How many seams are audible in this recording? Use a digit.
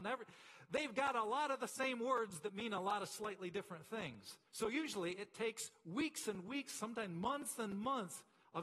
1